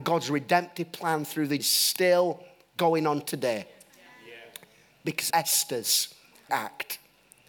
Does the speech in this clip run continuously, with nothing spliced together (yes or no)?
no